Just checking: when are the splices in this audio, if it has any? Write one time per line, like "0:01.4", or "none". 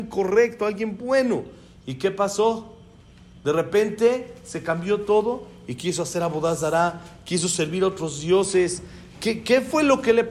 none